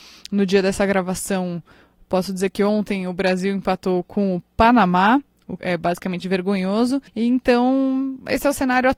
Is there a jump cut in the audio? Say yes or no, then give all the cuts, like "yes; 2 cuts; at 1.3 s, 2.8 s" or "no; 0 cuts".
yes; 2 cuts; at 5.6 s, 7.1 s